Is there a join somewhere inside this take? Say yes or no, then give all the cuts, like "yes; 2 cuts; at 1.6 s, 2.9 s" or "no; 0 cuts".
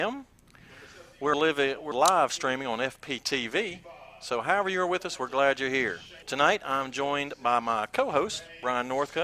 yes; 3 cuts; at 1.3 s, 1.9 s, 6.2 s